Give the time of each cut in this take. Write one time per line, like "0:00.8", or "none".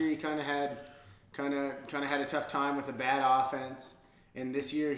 none